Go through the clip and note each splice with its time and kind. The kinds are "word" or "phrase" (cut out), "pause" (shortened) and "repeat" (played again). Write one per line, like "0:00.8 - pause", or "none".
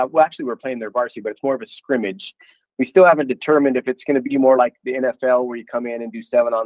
none